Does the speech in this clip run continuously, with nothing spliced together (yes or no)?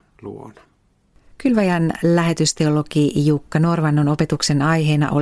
yes